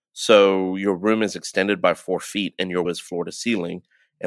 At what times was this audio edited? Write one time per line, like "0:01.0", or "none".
0:02.8